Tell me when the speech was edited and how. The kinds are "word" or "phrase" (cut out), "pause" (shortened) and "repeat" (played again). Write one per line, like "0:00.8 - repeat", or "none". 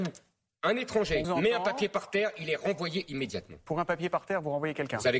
0:01.2 - word